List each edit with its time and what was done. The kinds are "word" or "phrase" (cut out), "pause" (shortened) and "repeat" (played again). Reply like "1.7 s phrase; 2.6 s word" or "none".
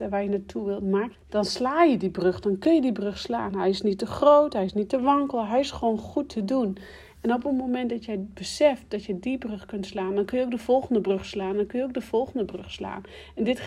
1.1 s word